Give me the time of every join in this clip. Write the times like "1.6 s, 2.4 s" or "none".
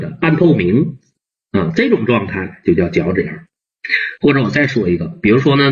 none